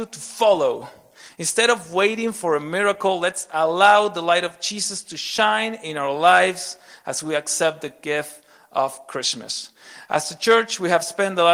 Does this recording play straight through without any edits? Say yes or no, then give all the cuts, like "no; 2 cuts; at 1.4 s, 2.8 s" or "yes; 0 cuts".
yes; 0 cuts